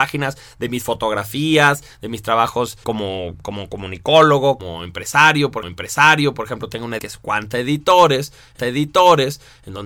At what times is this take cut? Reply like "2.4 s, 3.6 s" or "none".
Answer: 2.8 s, 4.6 s, 5.6 s, 7.0 s, 8.6 s